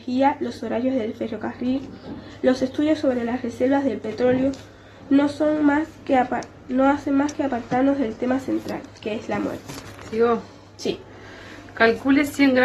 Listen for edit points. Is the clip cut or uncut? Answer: uncut